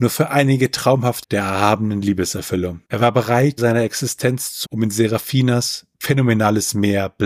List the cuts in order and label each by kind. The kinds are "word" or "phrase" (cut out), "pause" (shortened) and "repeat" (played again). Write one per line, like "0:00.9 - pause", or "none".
0:01.2 - word
0:02.8 - pause
0:03.6 - phrase
0:04.6 - word
0:05.9 - pause

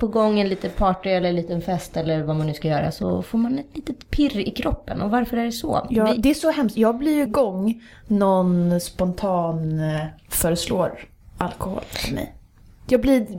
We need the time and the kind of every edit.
0:07.3 - phrase
0:11.2 - pause

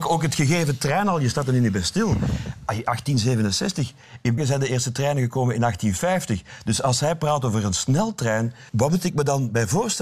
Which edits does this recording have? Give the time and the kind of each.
0:04.4 - word
0:08.7 - pause

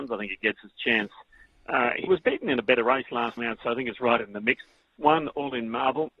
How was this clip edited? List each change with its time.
0:02.1 - word
0:03.4 - word

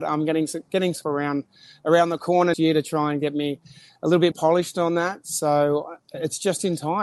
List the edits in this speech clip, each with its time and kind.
0:01.0 - word
0:02.5 - word
0:04.3 - word

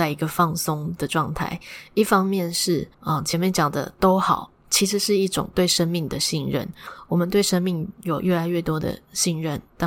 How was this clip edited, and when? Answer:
0:02.9 - pause

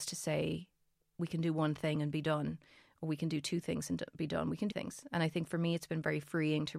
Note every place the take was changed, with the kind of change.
0:04.7 - word

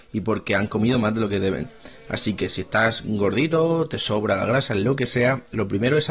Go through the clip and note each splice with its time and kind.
none

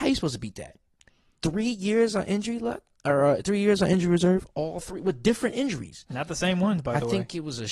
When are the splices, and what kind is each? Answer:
none

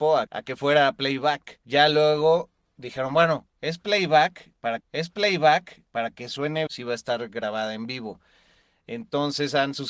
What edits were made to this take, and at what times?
0:04.8 - repeat
0:06.7 - phrase

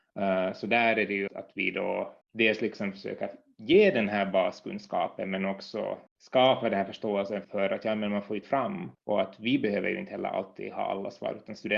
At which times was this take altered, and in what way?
0:01.3 - word
0:02.2 - pause
0:06.1 - pause
0:07.4 - word
0:08.4 - phrase
0:08.9 - pause

